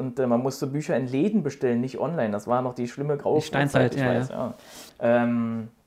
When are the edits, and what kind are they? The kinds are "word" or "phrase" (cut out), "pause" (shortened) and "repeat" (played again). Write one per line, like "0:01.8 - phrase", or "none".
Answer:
0:04.9 - pause